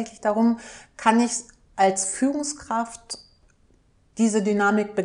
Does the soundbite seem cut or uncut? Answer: uncut